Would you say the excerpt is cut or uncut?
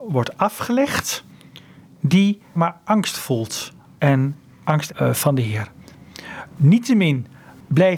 cut